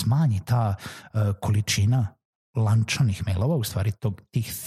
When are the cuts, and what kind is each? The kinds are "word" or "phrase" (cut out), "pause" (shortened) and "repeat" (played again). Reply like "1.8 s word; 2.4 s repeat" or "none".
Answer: none